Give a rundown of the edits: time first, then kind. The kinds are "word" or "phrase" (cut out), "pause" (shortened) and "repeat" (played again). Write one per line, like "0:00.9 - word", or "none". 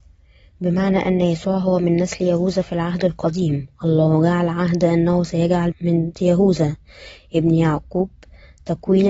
0:05.7 - word
0:06.1 - word